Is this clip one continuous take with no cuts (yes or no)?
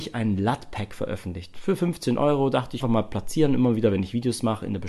no